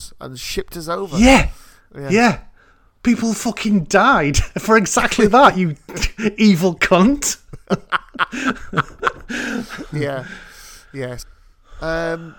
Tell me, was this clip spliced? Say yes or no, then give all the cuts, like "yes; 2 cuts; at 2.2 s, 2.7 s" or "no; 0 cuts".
no; 0 cuts